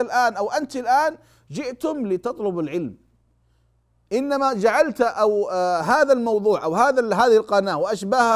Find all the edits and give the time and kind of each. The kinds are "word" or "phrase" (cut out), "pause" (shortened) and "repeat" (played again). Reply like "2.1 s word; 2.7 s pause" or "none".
none